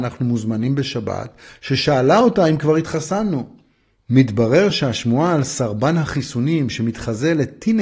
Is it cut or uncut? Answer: uncut